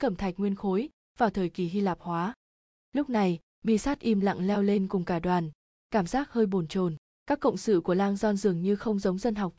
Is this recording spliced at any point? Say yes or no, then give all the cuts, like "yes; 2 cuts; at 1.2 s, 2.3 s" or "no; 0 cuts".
no; 0 cuts